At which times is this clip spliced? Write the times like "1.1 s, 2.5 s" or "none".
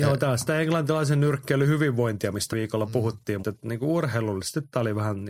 2.5 s, 3.4 s